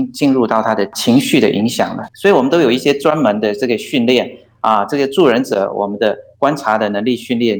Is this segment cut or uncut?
cut